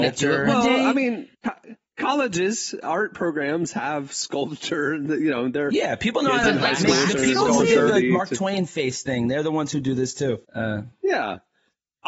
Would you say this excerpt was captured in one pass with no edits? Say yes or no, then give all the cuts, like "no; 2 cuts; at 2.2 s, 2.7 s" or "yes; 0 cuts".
no; 2 cuts; at 1.3 s, 10.4 s